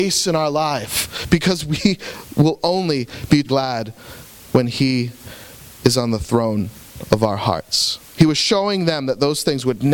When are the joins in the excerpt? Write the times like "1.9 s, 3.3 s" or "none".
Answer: 3.4 s